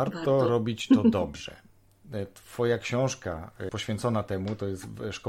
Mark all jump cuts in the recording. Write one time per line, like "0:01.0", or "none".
0:03.7